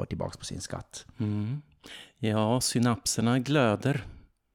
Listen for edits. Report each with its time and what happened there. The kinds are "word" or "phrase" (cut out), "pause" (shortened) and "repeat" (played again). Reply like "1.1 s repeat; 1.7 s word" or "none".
none